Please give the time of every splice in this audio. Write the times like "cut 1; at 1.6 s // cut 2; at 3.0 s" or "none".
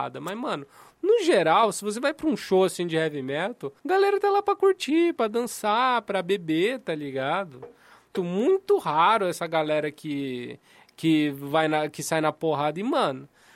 cut 1; at 3.8 s // cut 2; at 8.1 s